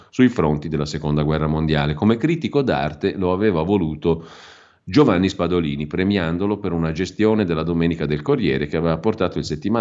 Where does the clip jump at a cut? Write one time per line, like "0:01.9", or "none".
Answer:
none